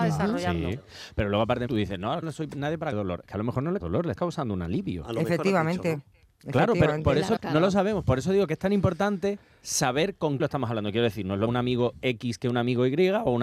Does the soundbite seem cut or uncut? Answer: cut